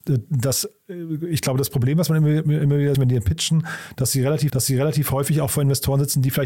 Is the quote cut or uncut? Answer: cut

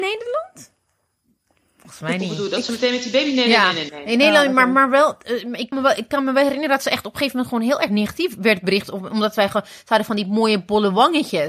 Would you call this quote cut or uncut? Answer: cut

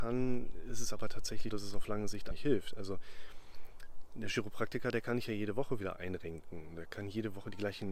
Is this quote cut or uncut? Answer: cut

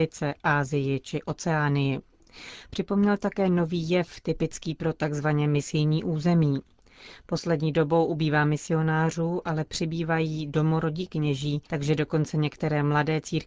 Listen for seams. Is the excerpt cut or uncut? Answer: cut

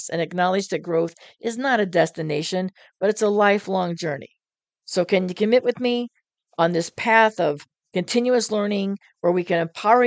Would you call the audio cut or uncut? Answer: uncut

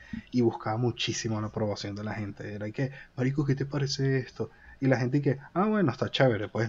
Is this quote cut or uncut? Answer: uncut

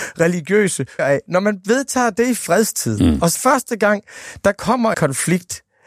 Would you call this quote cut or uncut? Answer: cut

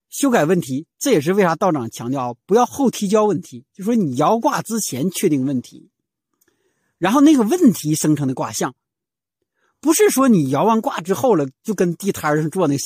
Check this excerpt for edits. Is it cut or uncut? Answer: uncut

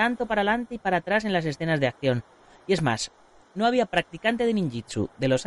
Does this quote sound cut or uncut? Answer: uncut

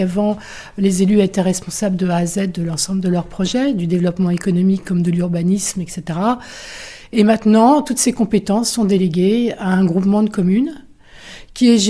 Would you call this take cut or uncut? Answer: uncut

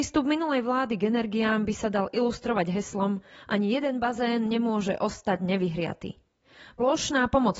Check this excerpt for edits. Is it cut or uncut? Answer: uncut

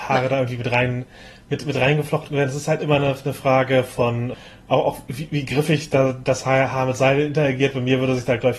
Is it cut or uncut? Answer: uncut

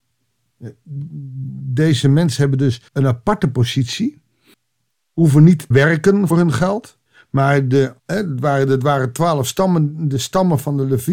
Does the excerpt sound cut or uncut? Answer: cut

